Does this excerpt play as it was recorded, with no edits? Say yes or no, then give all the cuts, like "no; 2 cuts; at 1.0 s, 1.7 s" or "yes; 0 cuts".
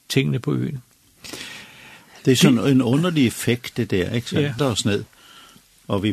no; 1 cut; at 4.6 s